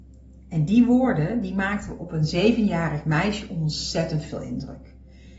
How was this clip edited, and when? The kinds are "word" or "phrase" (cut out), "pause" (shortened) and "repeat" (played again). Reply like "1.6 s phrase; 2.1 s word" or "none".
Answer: none